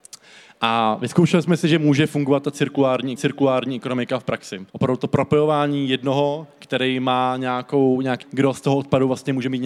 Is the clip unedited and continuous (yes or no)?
no